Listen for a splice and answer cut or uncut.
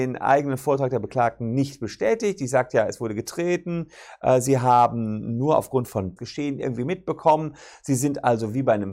cut